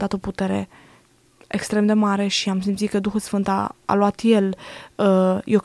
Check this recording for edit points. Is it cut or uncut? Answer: cut